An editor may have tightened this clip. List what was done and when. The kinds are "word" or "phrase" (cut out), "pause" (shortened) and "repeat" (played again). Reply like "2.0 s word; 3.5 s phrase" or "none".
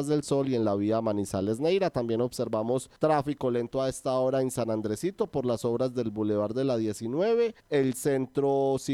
3.0 s pause; 7.6 s pause

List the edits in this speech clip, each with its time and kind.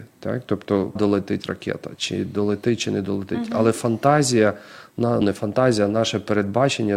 1.0 s word; 5.2 s word

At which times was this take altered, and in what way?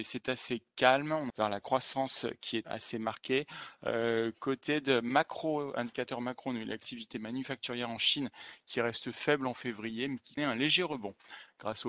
1.3 s phrase; 2.6 s word; 10.4 s word

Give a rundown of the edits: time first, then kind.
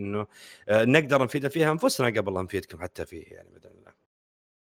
none

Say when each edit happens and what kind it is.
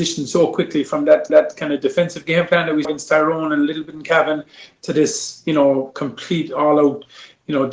1.3 s repeat; 2.8 s word

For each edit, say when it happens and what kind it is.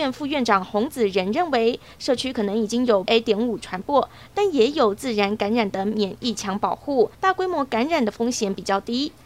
3.1 s word; 7.1 s pause

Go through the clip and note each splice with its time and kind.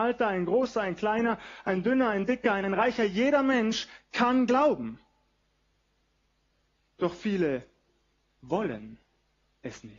2.6 s word

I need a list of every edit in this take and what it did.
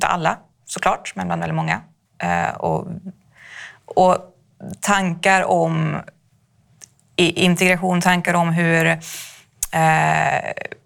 none

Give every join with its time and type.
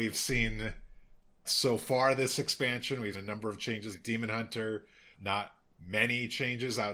1.4 s word; 3.1 s word; 3.9 s word; 5.1 s word

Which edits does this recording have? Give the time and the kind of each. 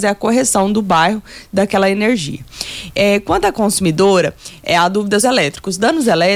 5.2 s phrase

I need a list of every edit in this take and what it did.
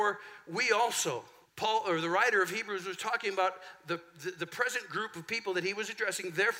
1.4 s pause

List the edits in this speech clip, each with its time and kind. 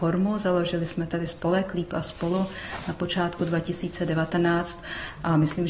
3.4 s word

